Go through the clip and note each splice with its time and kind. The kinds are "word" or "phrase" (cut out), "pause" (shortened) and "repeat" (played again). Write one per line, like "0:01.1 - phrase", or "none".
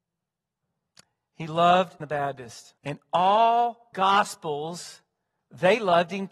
0:02.0 - word
0:02.8 - pause
0:03.9 - word